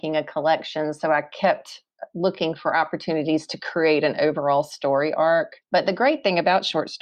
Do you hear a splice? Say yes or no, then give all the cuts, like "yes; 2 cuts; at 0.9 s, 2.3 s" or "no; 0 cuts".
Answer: yes; 1 cut; at 5.6 s